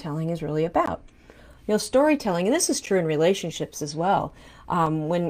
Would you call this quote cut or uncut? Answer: uncut